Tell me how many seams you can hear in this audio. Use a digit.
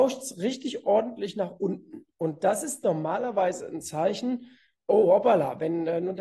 0